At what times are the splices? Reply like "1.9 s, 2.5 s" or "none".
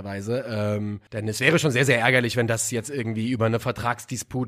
1.1 s